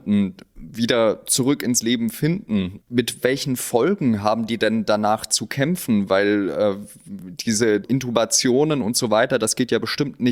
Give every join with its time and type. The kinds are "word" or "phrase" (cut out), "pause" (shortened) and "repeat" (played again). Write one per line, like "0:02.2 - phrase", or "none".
0:02.8 - word
0:07.8 - word